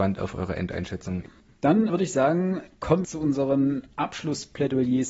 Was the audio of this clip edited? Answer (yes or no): yes